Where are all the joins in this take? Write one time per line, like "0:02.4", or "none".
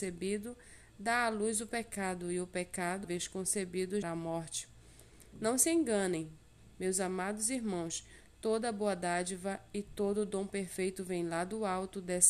0:03.0
0:04.0